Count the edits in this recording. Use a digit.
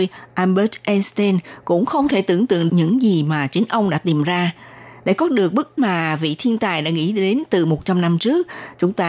2